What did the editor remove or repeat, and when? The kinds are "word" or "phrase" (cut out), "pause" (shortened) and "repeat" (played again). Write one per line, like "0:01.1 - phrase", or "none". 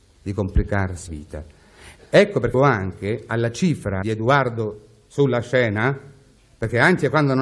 0:01.1 - word
0:02.5 - word
0:04.0 - phrase